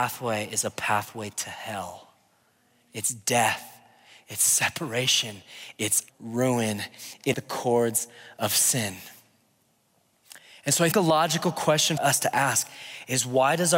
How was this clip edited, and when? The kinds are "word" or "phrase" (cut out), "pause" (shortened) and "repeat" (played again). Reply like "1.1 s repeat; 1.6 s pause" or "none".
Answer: 6.1 s word; 7.3 s word; 10.9 s word; 12.0 s word